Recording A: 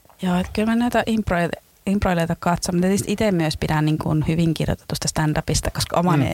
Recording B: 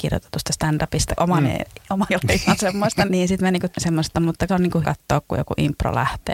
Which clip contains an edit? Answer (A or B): B